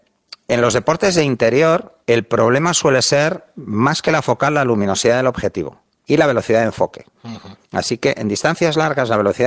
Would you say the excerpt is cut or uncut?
cut